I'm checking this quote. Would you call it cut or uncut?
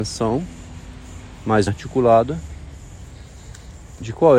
cut